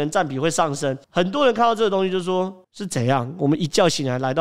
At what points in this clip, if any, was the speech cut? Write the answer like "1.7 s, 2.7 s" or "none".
1.0 s, 2.6 s